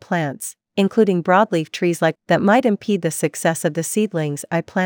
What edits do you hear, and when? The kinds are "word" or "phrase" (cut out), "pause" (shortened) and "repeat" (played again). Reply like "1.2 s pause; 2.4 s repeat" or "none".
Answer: 2.1 s word

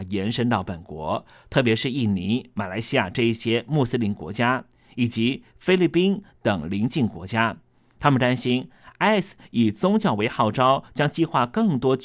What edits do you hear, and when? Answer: none

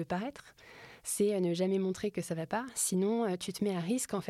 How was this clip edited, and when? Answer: none

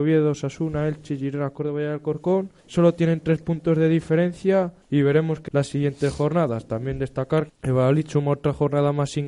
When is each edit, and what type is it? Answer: 2.6 s pause; 4.8 s pause; 5.5 s word; 7.5 s word

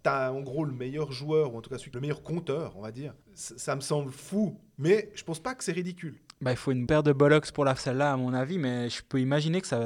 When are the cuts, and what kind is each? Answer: 1.9 s phrase; 3.2 s pause; 6.9 s word; 7.8 s word

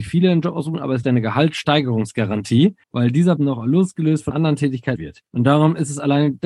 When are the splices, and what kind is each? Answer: 1.0 s phrase; 2.8 s pause; 3.4 s word; 4.3 s word; 5.0 s word; 5.3 s pause

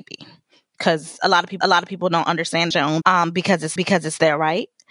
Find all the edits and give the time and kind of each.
1.6 s repeat; 2.7 s phrase; 3.0 s word; 3.8 s repeat

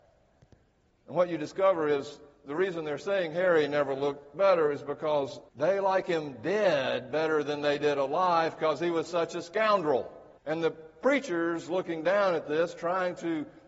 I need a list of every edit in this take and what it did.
2.4 s pause; 5.5 s pause; 10.4 s pause

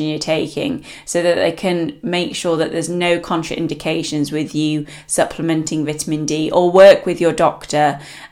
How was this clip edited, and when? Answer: none

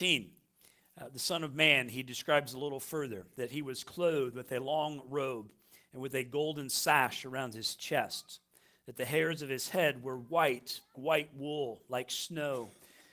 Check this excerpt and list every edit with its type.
10.9 s word

